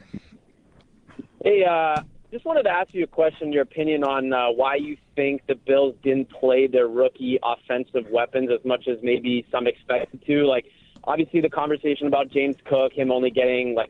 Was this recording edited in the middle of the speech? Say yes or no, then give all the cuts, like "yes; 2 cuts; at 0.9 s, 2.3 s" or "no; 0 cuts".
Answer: no; 0 cuts